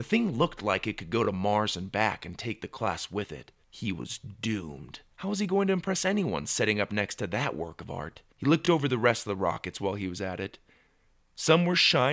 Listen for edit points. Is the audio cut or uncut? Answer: cut